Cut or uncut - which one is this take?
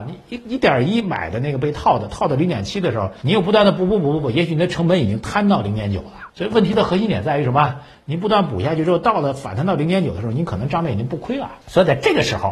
uncut